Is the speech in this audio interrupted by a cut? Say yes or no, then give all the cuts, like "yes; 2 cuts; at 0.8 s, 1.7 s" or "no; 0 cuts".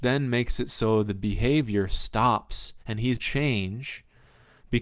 yes; 2 cuts; at 2.8 s, 3.2 s